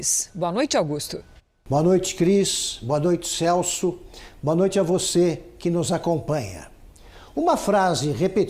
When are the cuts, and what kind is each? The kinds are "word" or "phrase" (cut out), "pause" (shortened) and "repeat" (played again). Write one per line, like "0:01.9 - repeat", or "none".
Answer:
0:01.4 - pause

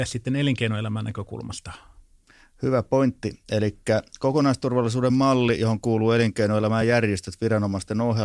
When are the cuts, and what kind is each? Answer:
none

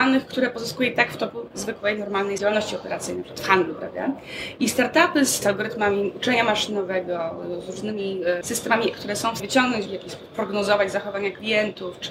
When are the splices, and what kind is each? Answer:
0:02.4 - word
0:05.4 - word
0:08.4 - word
0:08.9 - word
0:09.4 - word
0:09.9 - word

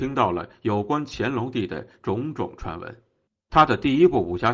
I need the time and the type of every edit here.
0:03.3 - pause

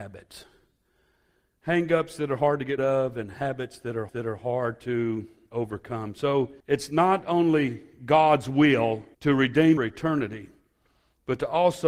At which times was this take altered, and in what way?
0:02.8 - word
0:04.1 - repeat
0:06.6 - pause
0:09.1 - pause
0:09.8 - phrase

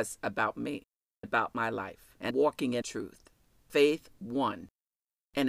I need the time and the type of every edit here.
0:01.2 - word
0:02.3 - word
0:02.8 - word

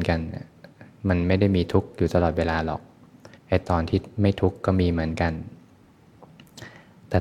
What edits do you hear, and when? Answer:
0:03.4 - pause

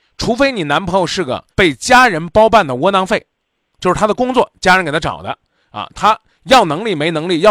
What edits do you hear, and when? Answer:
0:01.5 - pause

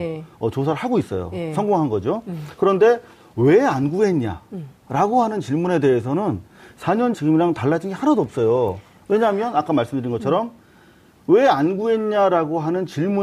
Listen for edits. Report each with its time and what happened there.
0:07.1 - word

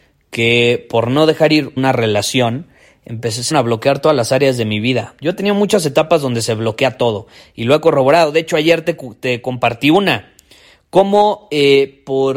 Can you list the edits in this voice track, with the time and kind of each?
0:01.8 - phrase
0:03.5 - word

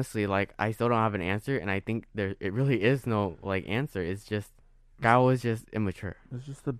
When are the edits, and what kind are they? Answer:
0:04.6 - pause

